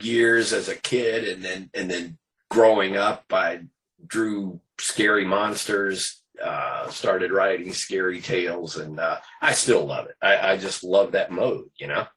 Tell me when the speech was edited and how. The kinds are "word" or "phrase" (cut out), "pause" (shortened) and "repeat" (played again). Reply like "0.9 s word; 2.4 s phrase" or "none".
10.4 s word